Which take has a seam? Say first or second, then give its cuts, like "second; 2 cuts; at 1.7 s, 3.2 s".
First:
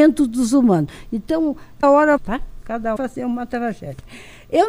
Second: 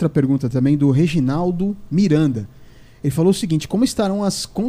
first; 3 cuts; at 1.8 s, 2.2 s, 3.0 s